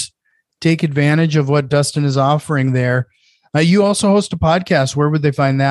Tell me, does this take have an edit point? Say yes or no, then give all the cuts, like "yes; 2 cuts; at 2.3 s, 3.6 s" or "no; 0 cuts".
no; 0 cuts